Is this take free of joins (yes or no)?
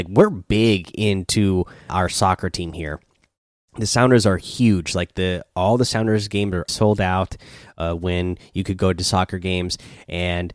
no